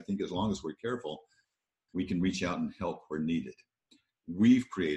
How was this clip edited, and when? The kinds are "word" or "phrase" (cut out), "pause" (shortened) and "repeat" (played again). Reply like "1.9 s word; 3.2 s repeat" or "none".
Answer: none